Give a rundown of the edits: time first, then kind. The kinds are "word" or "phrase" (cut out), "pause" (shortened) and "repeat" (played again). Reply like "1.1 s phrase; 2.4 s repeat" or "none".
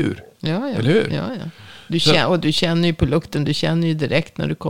none